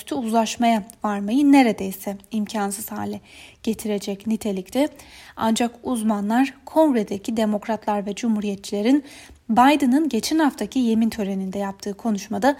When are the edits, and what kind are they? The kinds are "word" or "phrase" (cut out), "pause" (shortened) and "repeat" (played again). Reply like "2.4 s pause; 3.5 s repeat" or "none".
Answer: none